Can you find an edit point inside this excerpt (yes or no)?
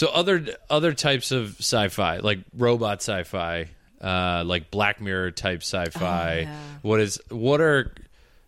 no